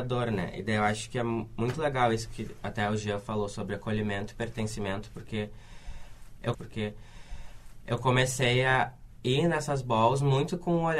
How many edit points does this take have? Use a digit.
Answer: 1